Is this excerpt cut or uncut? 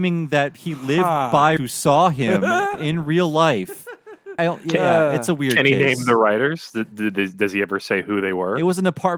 cut